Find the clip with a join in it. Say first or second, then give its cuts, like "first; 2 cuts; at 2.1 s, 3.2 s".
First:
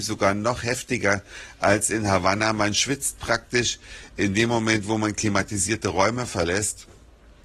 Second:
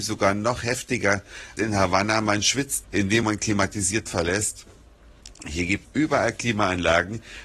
second; 5 cuts; at 1.6 s, 2.8 s, 3.2 s, 4.1 s, 5.8 s